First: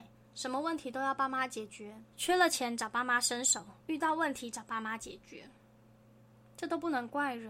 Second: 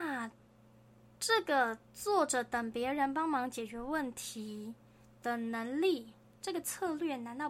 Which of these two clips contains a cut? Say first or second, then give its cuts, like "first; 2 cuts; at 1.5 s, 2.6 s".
first; 2 cuts; at 2.1 s, 3.8 s